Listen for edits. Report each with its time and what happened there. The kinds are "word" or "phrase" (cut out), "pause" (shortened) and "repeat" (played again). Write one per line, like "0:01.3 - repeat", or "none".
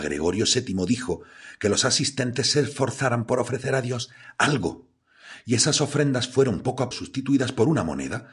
0:06.9 - word